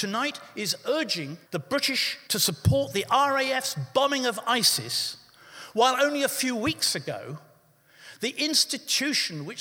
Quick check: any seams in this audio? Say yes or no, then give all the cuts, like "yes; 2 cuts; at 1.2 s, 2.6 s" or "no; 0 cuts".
yes; 2 cuts; at 1.4 s, 2.2 s